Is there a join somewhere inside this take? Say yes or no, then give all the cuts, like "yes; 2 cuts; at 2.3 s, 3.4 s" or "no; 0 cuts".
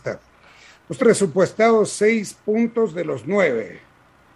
yes; 1 cut; at 1.0 s